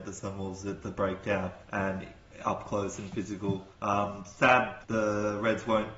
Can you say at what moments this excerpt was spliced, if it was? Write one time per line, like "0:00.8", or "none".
0:01.6
0:03.7
0:04.8